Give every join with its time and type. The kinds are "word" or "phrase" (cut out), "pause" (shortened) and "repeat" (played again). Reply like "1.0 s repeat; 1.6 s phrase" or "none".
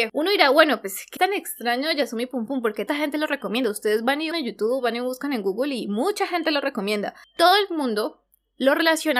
1.2 s word; 2.9 s word; 4.3 s word